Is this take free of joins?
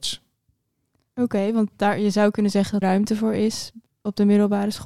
no; 1 cut; at 2.8 s

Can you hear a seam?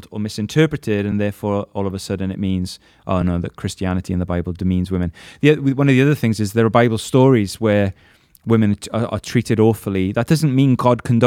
no; 0 cuts

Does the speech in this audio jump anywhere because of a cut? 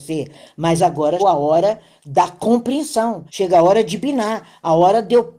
yes; 2 cuts; at 1.2 s, 3.3 s

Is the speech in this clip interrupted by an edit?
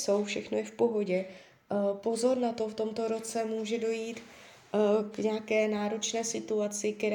no; 0 cuts

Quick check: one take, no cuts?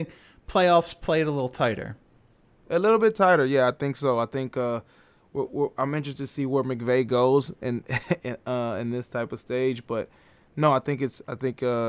yes; 0 cuts

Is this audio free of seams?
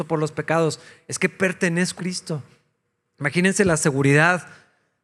no; 1 cut; at 2.0 s

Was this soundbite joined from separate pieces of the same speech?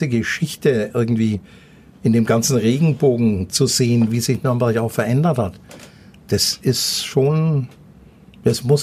no; 0 cuts

